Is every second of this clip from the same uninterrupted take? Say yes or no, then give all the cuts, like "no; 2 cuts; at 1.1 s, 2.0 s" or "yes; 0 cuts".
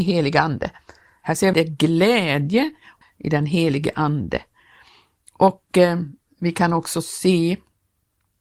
no; 2 cuts; at 1.5 s, 3.0 s